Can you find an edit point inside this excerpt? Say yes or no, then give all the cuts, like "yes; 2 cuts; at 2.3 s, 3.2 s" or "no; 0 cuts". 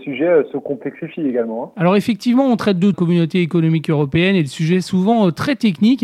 yes; 1 cut; at 2.9 s